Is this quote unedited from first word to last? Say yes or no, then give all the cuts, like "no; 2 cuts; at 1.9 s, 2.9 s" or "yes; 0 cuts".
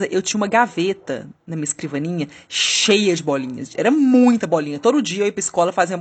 yes; 0 cuts